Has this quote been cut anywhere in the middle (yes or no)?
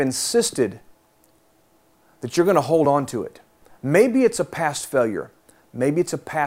no